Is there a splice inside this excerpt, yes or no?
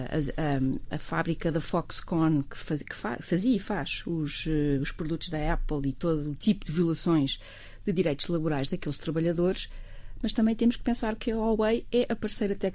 no